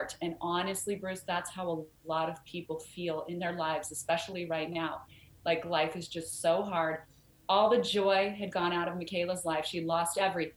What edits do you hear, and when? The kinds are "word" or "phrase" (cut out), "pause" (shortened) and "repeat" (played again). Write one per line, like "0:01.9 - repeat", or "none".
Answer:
none